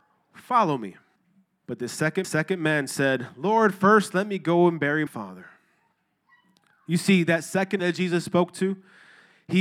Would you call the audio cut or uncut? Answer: cut